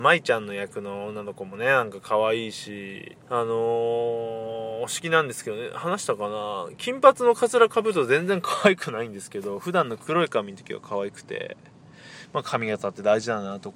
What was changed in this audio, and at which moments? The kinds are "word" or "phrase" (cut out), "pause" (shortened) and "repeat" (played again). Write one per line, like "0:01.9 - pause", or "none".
0:03.2 - pause